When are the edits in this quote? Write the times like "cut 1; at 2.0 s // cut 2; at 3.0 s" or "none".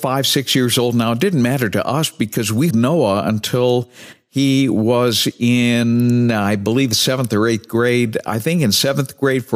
cut 1; at 2.7 s

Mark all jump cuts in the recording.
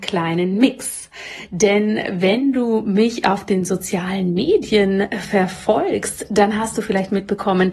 none

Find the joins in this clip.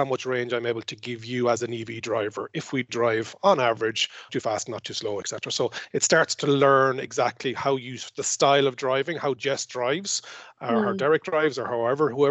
cut 1; at 4.3 s // cut 2; at 5.2 s

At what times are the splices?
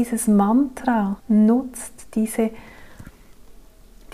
cut 1; at 1.2 s

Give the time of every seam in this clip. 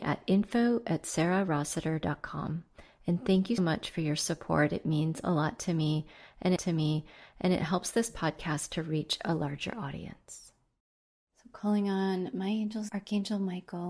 cut 1; at 3.6 s // cut 2; at 6.6 s // cut 3; at 10.8 s // cut 4; at 12.9 s

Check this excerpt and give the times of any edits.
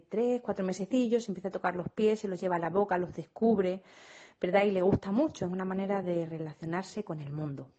none

